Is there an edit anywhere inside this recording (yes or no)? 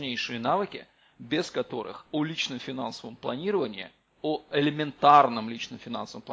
no